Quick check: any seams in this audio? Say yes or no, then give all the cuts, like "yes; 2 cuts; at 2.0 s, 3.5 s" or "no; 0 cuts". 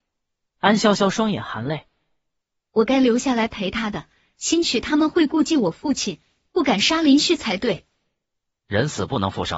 no; 0 cuts